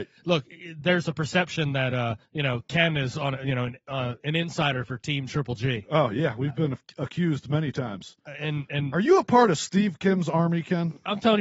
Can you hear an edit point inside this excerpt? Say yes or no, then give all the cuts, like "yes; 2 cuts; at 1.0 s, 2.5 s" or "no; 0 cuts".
yes; 1 cut; at 2.2 s